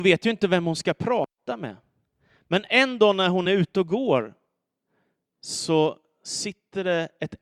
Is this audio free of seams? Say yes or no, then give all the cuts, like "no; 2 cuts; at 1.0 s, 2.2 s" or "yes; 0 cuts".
yes; 0 cuts